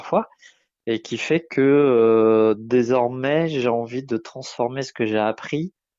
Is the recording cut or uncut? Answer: uncut